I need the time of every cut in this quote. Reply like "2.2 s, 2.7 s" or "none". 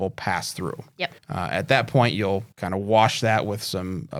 1.2 s, 2.5 s